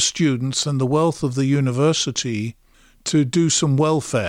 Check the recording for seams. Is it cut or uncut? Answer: uncut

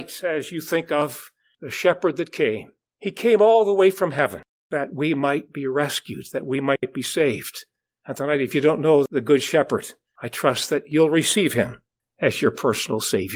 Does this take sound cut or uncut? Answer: uncut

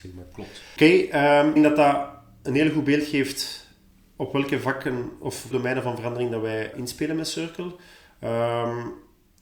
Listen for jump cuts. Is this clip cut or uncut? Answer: cut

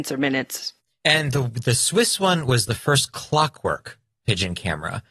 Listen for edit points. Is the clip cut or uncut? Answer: uncut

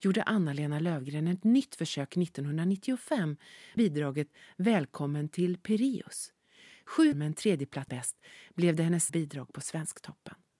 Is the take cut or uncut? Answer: cut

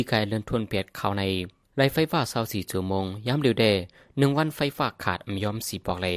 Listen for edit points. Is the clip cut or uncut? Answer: uncut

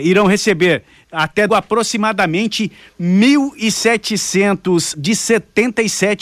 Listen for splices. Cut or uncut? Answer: cut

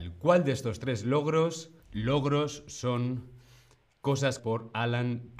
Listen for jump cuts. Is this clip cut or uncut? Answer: cut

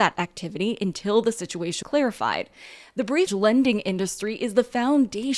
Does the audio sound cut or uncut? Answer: cut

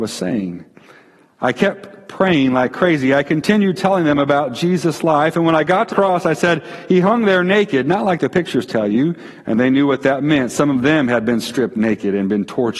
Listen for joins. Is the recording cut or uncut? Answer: cut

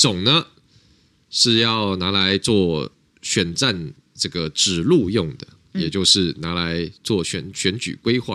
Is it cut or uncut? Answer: uncut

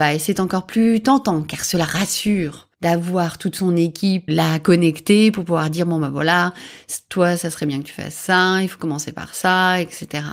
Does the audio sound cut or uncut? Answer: cut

